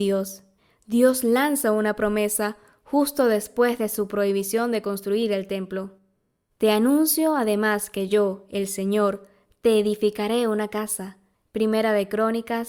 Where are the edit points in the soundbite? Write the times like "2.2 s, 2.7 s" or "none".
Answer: none